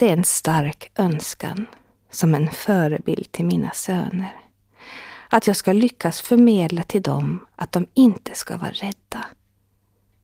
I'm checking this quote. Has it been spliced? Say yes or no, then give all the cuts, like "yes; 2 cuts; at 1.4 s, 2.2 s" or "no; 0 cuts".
no; 0 cuts